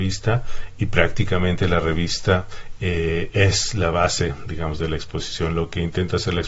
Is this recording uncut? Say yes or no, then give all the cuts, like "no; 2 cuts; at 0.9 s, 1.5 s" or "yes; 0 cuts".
yes; 0 cuts